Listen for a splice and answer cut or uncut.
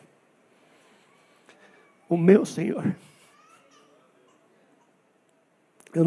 uncut